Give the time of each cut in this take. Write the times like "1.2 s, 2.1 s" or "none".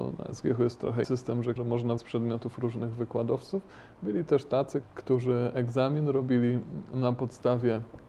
1.0 s, 1.6 s, 2.0 s, 4.8 s